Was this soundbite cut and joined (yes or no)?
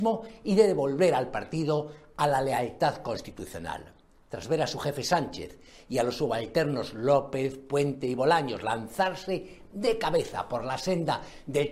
no